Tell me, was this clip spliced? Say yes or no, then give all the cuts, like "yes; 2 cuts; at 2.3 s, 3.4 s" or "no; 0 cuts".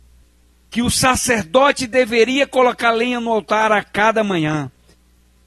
no; 0 cuts